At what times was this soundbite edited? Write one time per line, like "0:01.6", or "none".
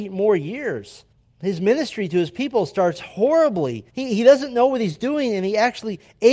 0:01.1
0:03.9